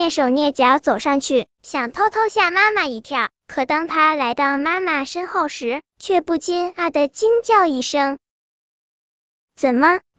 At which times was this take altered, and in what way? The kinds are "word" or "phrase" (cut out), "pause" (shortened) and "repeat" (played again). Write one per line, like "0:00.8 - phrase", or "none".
none